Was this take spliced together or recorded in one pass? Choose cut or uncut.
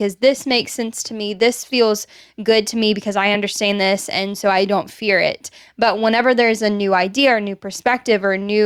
uncut